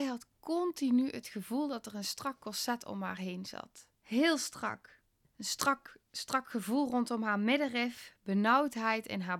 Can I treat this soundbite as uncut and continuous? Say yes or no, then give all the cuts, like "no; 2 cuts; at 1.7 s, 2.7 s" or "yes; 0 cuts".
no; 2 cuts; at 4.0 s, 5.2 s